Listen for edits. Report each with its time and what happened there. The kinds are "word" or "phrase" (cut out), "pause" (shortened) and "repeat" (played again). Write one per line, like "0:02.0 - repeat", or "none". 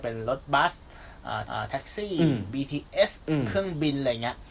0:01.4 - repeat

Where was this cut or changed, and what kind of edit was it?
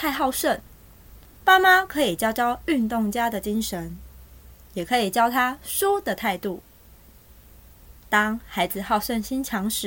none

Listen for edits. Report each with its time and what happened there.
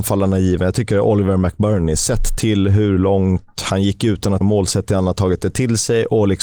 0:04.4 - word

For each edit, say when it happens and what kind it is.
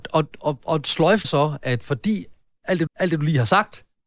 0:01.2 - word
0:02.9 - repeat

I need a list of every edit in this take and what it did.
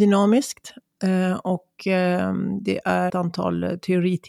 0:03.1 - word

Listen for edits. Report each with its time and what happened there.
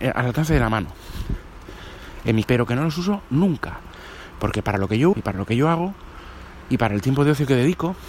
0:02.4 - word
0:05.1 - word

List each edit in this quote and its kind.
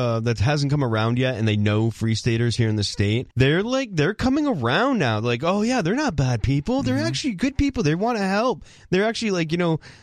0:03.3 - pause

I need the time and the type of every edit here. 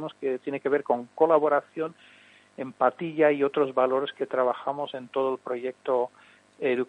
none

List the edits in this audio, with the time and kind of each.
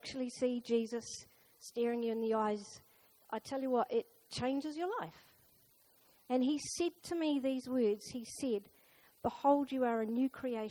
none

